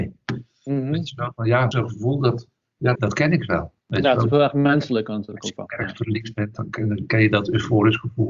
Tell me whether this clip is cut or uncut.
cut